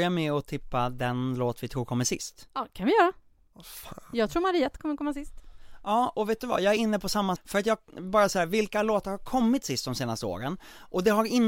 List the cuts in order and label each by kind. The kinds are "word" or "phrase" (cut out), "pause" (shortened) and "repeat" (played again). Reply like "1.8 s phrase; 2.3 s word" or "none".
7.4 s word